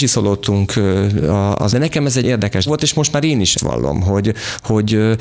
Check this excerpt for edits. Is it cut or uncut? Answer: cut